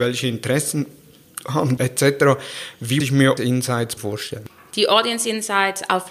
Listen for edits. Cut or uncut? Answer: cut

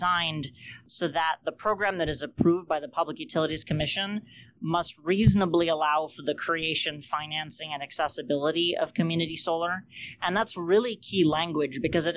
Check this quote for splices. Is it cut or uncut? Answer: uncut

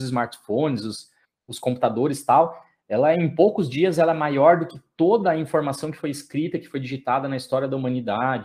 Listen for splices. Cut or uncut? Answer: uncut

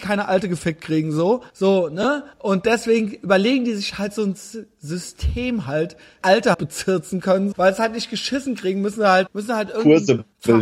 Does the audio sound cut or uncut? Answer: cut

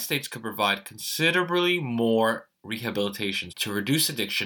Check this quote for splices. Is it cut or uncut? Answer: cut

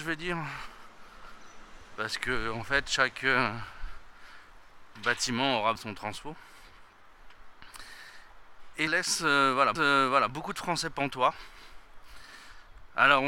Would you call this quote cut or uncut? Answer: cut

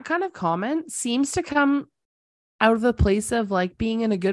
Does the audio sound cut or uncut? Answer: uncut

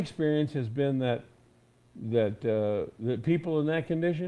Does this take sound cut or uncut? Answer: uncut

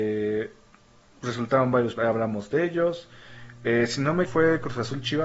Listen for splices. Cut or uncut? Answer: cut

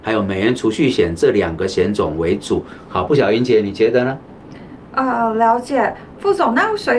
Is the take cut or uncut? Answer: uncut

